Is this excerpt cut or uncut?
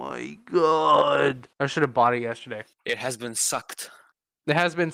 cut